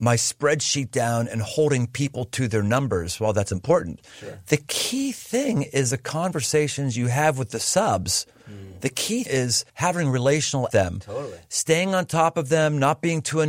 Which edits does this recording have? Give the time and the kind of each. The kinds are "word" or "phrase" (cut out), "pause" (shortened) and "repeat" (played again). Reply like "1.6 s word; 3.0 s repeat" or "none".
9.3 s word; 9.7 s pause; 10.7 s phrase